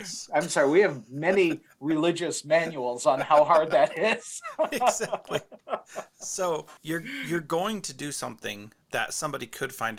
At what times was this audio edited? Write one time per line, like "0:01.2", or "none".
0:06.8